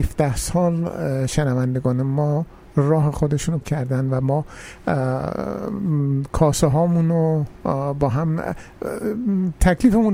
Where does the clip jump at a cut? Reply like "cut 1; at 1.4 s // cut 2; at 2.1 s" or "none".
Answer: cut 1; at 3.6 s